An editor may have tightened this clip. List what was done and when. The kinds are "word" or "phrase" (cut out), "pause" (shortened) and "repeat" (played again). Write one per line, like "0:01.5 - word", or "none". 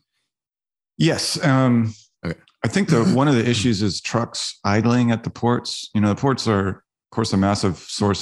none